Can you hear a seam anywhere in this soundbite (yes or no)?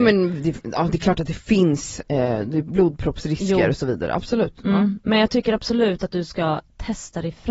no